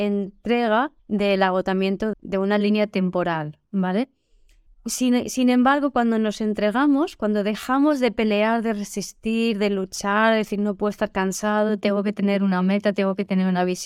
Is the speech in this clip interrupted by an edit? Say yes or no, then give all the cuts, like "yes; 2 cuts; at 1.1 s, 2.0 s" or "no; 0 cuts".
yes; 3 cuts; at 1.0 s, 2.1 s, 4.7 s